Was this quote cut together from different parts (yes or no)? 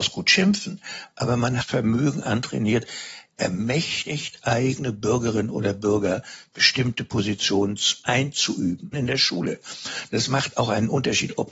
yes